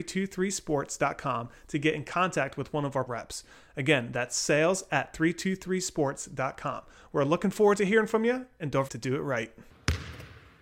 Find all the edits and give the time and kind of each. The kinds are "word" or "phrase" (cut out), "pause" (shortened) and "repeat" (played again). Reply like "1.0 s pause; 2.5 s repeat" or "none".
3.1 s word; 8.9 s word